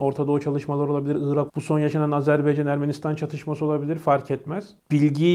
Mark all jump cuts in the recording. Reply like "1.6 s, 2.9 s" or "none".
1.5 s